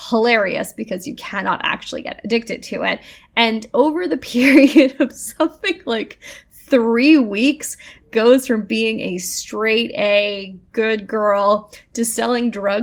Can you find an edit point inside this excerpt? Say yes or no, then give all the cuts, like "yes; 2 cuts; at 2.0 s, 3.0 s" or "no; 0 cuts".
no; 0 cuts